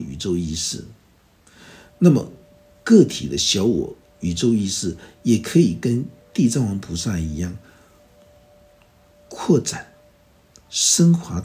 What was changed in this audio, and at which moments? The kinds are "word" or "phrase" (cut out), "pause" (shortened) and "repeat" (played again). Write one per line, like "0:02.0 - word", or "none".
none